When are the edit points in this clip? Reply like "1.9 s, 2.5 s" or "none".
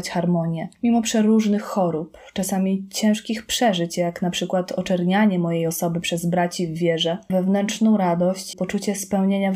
7.3 s, 8.5 s